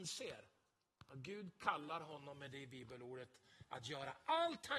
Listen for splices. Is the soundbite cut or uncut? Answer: uncut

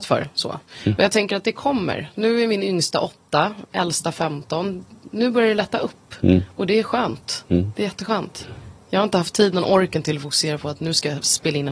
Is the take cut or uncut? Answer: uncut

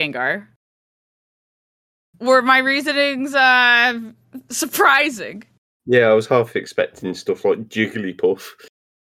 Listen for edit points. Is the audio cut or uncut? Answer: uncut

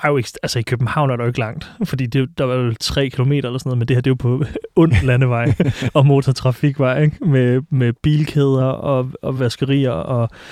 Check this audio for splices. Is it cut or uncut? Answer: uncut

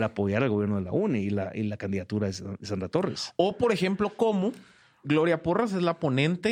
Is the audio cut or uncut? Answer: cut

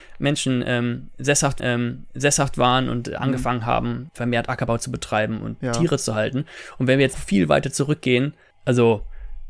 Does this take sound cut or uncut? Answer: cut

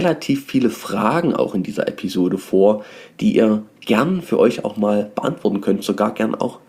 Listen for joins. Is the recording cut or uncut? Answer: uncut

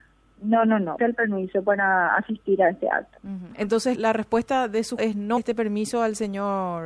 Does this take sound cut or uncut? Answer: cut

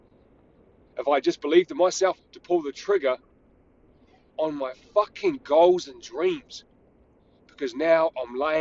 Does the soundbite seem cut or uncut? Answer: cut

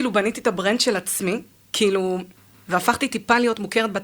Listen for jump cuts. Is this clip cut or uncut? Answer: uncut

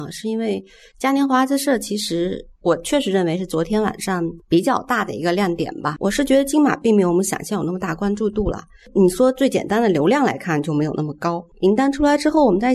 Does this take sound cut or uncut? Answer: uncut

